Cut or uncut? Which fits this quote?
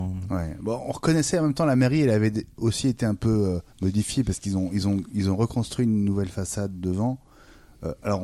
cut